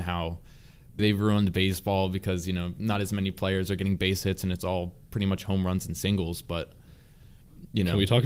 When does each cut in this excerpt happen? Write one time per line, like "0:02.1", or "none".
0:01.0

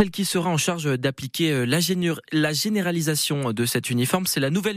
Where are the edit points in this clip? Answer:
none

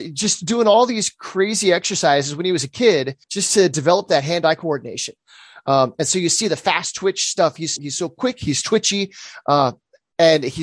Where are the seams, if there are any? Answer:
0:03.2
0:07.8

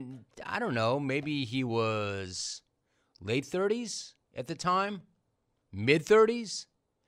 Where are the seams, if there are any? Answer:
none

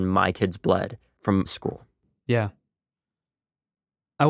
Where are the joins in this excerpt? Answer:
0:01.5

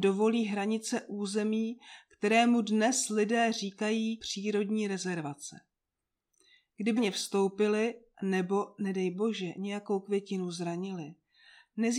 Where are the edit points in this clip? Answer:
0:07.0

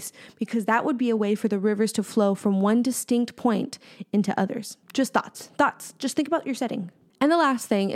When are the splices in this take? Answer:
none

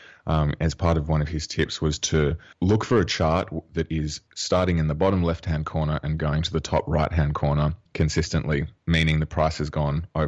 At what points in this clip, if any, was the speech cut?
0:02.5

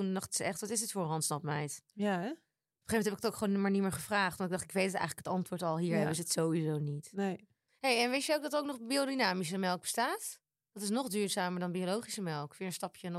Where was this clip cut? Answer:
none

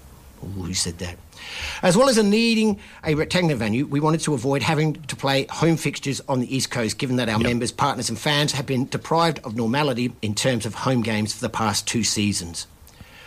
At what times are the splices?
0:10.2

